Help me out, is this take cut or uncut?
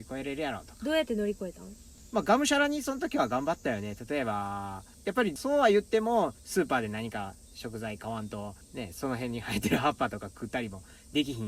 uncut